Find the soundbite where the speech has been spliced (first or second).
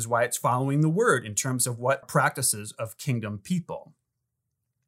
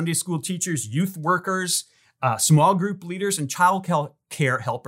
first